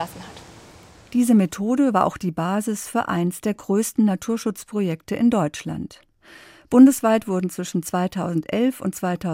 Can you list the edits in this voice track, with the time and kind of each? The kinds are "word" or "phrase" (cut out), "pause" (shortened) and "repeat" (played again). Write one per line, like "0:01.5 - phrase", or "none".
none